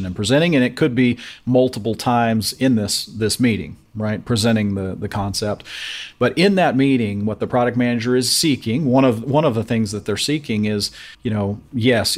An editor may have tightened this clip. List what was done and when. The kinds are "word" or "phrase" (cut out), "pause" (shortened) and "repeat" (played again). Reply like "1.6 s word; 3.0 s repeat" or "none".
11.1 s pause

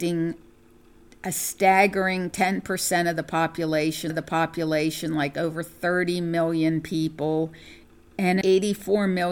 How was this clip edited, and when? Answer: 4.1 s repeat; 8.4 s word

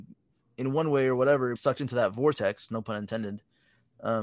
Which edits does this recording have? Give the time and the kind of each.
1.6 s word

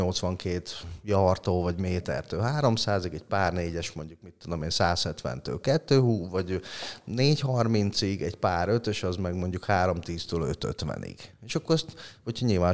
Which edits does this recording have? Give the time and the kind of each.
none

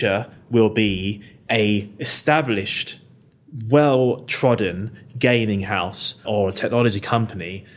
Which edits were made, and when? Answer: 6.2 s word

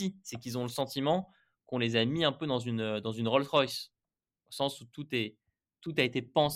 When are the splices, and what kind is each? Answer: none

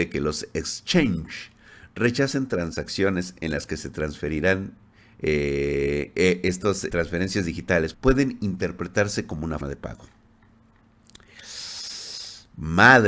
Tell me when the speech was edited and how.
6.9 s word; 7.9 s word; 9.6 s word

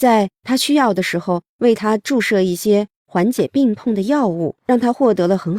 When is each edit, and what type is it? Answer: 4.6 s pause

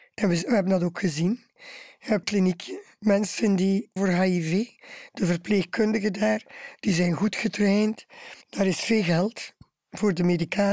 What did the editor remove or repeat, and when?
2.2 s phrase; 4.0 s word; 8.4 s pause

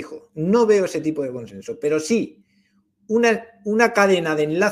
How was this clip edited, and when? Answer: none

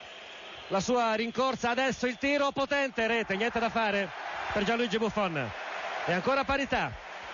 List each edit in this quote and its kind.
none

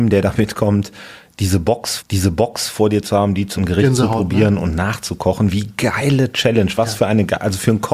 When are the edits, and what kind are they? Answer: 2.0 s repeat; 3.6 s word

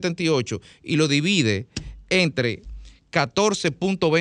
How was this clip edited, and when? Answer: none

